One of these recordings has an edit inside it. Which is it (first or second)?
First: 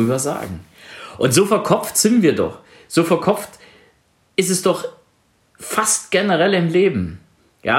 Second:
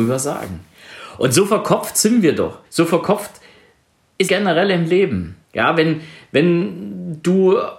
second